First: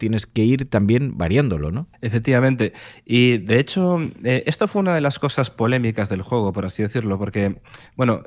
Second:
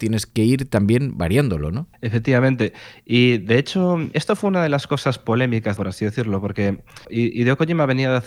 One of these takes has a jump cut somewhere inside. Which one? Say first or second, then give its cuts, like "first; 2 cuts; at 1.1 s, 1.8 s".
second; 3 cuts; at 4.1 s, 5.8 s, 7.0 s